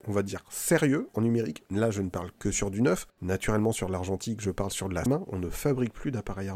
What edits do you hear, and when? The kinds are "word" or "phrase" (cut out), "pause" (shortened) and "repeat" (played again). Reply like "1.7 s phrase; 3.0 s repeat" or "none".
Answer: 1.7 s pause; 5.1 s word